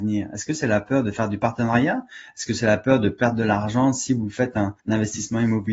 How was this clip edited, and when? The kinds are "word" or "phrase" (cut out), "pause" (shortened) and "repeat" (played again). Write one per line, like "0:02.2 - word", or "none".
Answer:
0:04.8 - pause